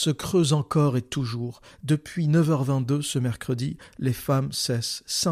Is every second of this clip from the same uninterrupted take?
yes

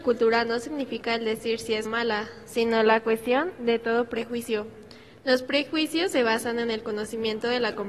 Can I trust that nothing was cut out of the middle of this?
no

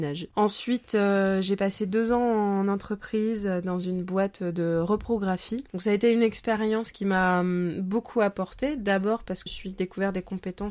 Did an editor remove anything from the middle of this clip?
yes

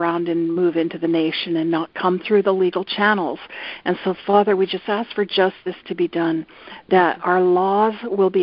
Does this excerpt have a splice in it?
no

